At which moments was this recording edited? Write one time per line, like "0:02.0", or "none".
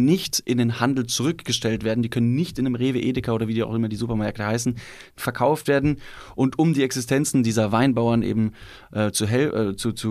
none